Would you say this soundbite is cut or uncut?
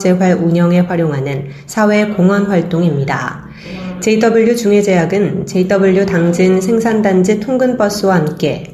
uncut